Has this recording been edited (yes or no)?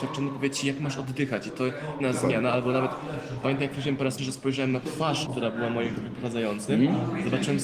yes